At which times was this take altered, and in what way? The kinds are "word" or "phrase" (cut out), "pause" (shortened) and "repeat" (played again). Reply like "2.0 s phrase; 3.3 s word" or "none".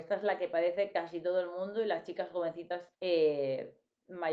2.9 s pause